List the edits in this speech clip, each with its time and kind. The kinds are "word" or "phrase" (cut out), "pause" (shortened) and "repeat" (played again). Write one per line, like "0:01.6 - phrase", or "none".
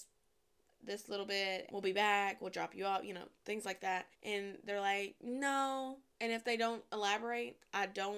0:01.7 - word
0:04.1 - pause